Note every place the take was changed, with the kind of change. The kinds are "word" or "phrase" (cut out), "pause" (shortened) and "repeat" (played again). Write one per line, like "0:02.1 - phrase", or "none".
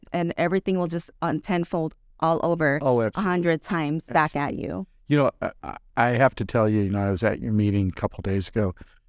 none